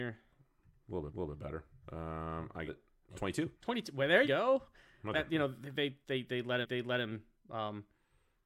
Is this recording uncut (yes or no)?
no